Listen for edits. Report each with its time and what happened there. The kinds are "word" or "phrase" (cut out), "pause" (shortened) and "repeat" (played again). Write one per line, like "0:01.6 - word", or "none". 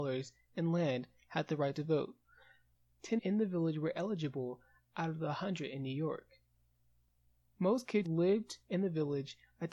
0:03.2 - word
0:08.0 - word